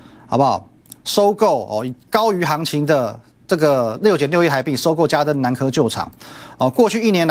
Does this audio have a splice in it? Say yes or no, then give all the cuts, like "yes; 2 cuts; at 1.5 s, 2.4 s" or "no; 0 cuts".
yes; 1 cut; at 1.0 s